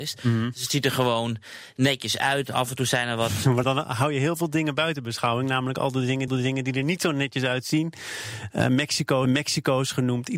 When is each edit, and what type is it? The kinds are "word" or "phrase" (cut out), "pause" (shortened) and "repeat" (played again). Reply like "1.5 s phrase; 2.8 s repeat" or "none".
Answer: 3.6 s word; 6.3 s repeat; 9.2 s repeat